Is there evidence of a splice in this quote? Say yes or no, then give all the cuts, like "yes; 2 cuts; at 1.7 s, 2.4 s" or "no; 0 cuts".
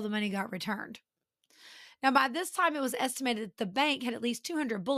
no; 0 cuts